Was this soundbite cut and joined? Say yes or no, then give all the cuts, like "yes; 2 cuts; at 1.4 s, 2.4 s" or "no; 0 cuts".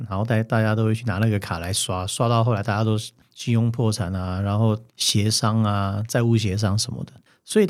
yes; 1 cut; at 4.9 s